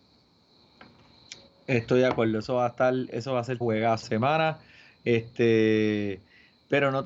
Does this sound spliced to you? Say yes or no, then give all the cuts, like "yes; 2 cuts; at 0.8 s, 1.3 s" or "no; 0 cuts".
yes; 2 cuts; at 3.6 s, 4.0 s